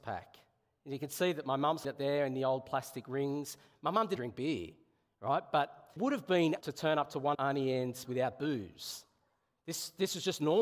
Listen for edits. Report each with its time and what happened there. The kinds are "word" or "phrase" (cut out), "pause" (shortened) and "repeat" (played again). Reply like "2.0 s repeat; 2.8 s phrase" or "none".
1.8 s word; 4.2 s word; 6.0 s word; 6.6 s word; 7.3 s word; 8.0 s word